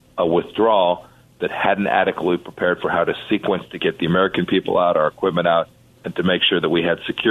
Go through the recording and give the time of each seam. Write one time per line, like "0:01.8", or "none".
none